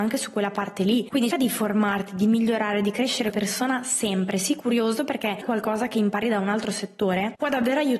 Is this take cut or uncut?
cut